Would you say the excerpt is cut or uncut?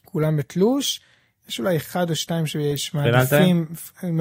uncut